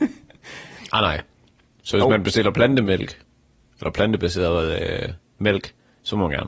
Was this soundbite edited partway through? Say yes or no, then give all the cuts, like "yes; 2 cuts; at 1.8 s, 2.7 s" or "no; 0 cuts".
no; 0 cuts